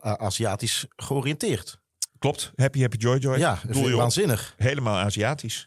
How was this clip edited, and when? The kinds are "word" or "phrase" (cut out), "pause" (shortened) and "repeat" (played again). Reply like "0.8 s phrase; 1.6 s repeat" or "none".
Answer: 2.1 s pause